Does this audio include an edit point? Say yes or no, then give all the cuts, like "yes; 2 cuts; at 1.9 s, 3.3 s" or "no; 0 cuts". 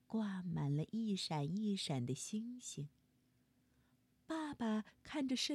no; 0 cuts